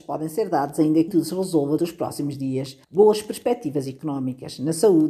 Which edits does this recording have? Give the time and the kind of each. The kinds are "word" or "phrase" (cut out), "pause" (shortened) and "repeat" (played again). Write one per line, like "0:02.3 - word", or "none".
0:01.1 - word
0:01.8 - word
0:02.8 - pause

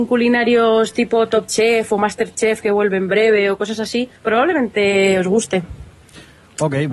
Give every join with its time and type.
0:04.2 - pause

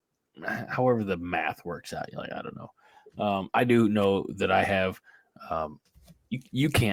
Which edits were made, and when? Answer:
none

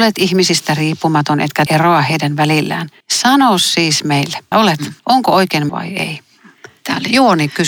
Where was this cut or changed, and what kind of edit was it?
0:01.7 - word
0:03.0 - pause
0:04.5 - phrase
0:05.0 - pause
0:05.7 - phrase

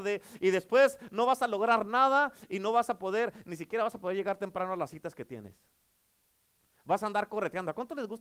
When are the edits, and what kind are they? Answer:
none

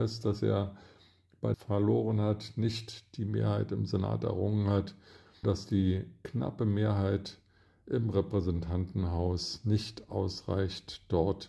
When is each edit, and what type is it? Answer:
0:01.5 - phrase
0:05.4 - word

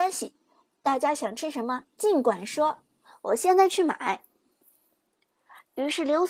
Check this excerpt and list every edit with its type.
none

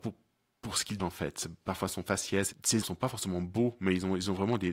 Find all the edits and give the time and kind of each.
0:01.0 - word
0:02.8 - word

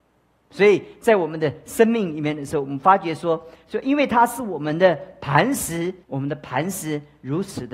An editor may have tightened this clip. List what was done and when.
0:06.0 - pause

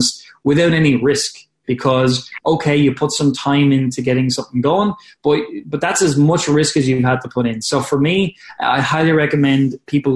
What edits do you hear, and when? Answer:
none

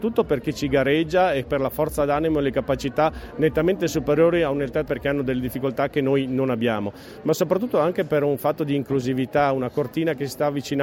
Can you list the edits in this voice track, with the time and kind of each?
0:04.9 - word

